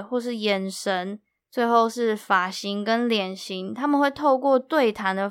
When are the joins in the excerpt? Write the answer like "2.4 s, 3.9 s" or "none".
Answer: none